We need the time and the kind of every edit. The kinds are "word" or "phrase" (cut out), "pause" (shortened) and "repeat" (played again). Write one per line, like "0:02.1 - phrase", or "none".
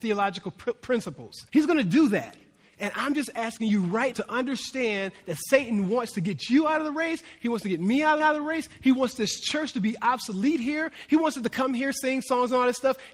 0:01.5 - pause
0:04.1 - word
0:08.2 - repeat

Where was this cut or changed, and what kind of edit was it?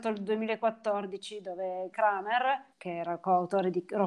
0:01.9 - phrase
0:02.7 - pause

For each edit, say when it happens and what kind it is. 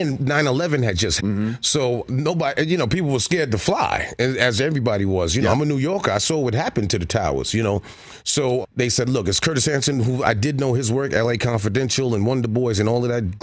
0:01.2 - word
0:08.6 - word

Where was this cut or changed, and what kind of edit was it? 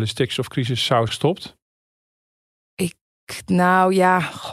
0:01.1 - word

